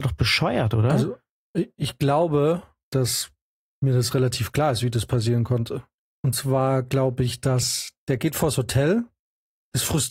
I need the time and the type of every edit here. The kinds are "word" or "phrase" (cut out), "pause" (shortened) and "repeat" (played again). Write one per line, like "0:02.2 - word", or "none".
none